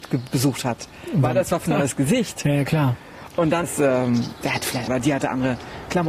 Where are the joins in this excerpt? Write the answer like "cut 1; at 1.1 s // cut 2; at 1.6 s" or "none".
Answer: cut 1; at 1.7 s // cut 2; at 3.6 s // cut 3; at 4.9 s